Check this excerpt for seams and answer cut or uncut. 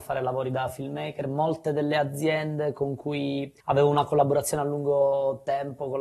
cut